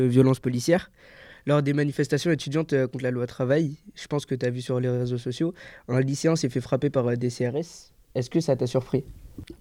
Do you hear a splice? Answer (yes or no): no